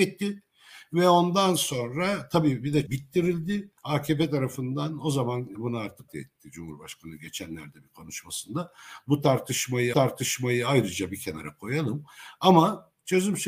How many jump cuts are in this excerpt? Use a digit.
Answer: 5